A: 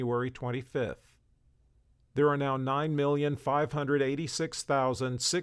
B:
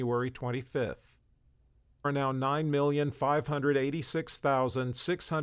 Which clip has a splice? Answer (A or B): B